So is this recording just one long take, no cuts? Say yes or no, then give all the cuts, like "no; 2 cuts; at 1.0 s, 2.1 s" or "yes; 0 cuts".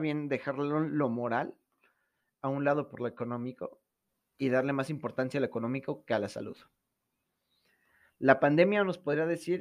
yes; 0 cuts